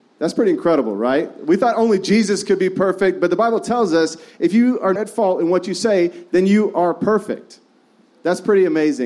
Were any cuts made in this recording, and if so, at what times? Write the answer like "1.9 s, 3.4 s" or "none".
5.0 s